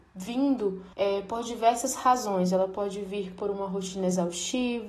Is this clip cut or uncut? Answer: cut